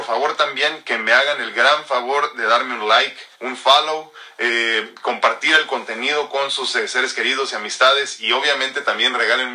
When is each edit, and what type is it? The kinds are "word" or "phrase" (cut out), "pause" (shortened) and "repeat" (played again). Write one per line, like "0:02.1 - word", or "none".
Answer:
0:03.3 - pause

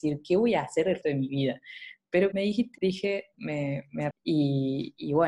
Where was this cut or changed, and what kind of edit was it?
0:01.0 - word
0:02.3 - word
0:02.8 - word
0:03.3 - word
0:04.1 - word

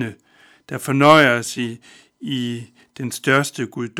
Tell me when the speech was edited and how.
none

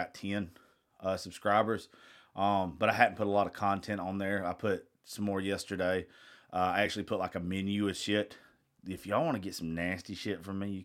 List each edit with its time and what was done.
none

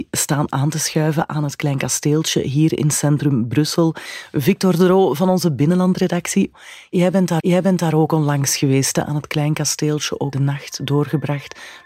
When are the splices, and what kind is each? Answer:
0:07.4 - repeat
0:10.3 - word

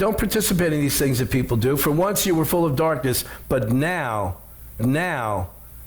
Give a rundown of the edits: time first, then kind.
0:04.8 - repeat

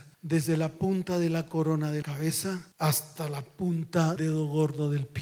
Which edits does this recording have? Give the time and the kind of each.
0:02.0 - word
0:02.7 - pause
0:04.2 - word

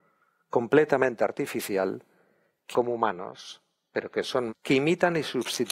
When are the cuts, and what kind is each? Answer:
0:02.7 - word
0:04.5 - word

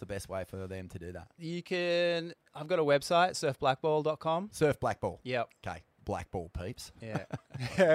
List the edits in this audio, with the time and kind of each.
0:06.0 - word

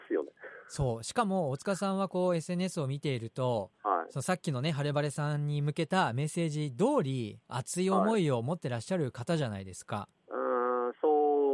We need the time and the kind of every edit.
0:03.8 - pause
0:10.2 - pause

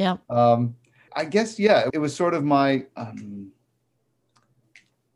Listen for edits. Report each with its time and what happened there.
0:01.1 - word
0:01.9 - word

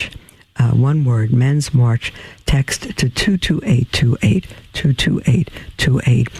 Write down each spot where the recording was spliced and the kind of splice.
none

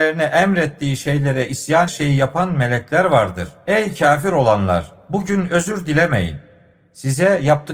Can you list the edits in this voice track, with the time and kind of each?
0:01.9 - phrase

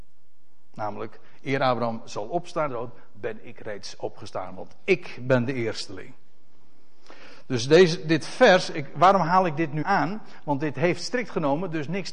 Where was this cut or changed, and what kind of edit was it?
0:02.7 - word
0:09.8 - word

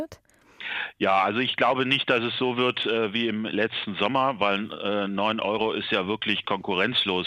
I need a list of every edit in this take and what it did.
none

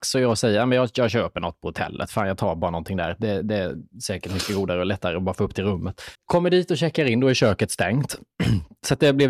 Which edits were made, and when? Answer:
0:06.1 - pause

